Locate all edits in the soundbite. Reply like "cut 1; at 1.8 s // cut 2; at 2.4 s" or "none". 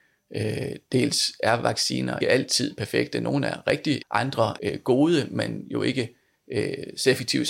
cut 1; at 2.2 s // cut 2; at 4.0 s // cut 3; at 4.6 s